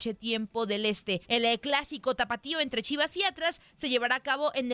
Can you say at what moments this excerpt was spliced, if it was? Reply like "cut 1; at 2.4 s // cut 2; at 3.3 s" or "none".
cut 1; at 1.2 s